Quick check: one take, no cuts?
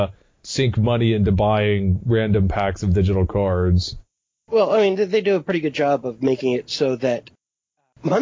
yes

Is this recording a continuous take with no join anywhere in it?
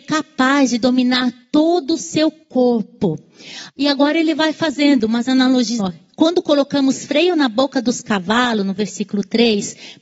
no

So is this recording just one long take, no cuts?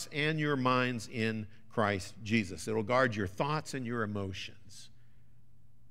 yes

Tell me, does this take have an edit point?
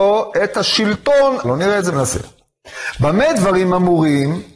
yes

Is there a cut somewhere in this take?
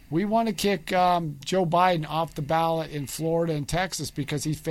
no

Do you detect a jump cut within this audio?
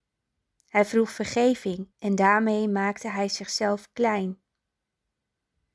yes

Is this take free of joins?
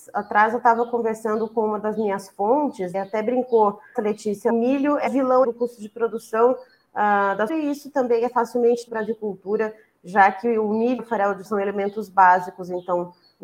no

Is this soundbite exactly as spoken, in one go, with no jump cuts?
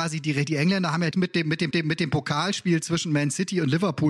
no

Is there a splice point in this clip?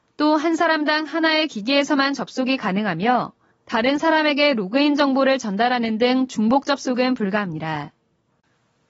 no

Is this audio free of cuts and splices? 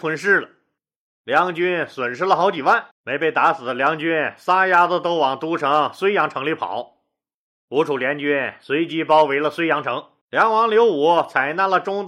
no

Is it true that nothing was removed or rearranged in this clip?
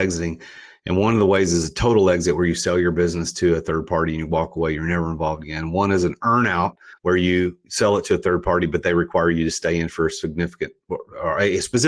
no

